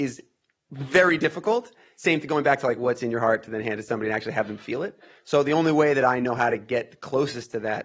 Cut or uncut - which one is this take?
uncut